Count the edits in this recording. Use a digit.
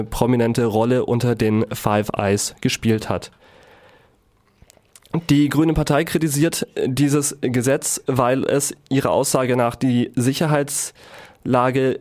0